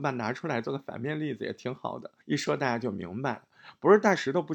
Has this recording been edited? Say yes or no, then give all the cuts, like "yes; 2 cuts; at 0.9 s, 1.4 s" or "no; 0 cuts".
yes; 1 cut; at 2.2 s